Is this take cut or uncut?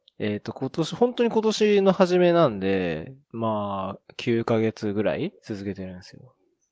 cut